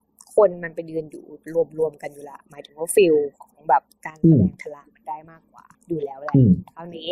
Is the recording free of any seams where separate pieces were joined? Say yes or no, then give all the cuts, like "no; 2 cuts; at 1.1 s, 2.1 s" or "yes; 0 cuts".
no; 1 cut; at 5.7 s